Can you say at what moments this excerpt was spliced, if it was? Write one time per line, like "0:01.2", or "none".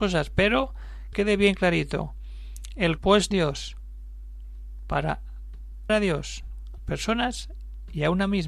0:01.1
0:03.0
0:03.3
0:05.9
0:06.8